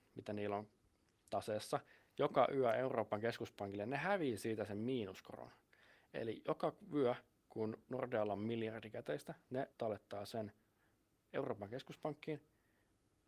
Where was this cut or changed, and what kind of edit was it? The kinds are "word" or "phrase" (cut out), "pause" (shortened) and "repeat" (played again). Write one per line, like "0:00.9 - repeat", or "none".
0:09.7 - pause